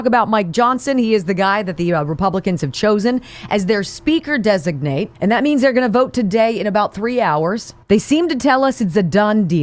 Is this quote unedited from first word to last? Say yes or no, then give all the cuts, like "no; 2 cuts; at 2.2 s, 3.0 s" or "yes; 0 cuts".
no; 2 cuts; at 5.1 s, 7.8 s